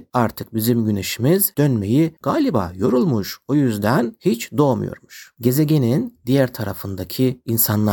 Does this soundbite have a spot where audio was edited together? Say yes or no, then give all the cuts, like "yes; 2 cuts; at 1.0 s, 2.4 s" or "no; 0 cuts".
yes; 2 cuts; at 1.5 s, 2.2 s